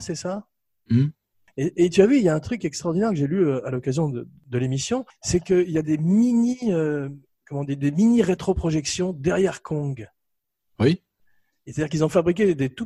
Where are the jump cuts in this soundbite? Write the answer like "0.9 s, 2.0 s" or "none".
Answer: none